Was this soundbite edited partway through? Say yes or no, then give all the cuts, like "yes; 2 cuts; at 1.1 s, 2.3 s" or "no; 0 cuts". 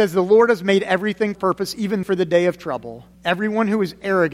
yes; 3 cuts; at 1.3 s, 2.0 s, 3.1 s